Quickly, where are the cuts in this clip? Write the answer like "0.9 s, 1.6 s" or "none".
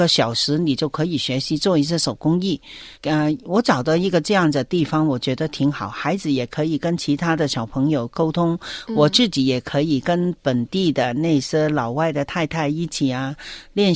2.9 s